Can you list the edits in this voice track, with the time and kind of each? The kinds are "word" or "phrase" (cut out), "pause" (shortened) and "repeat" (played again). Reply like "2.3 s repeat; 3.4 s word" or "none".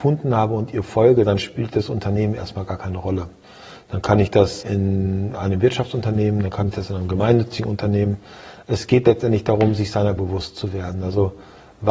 4.6 s word; 10.2 s word

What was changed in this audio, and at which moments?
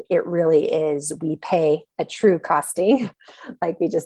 none

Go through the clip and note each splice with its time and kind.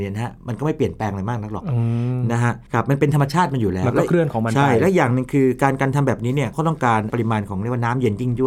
2.7 s pause

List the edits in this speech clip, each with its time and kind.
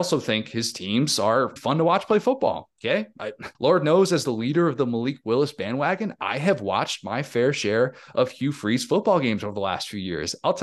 1.6 s word; 3.5 s pause

